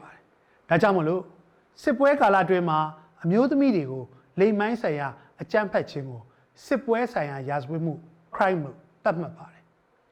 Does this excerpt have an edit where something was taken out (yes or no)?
yes